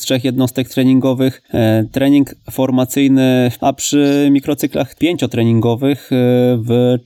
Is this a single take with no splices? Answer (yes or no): no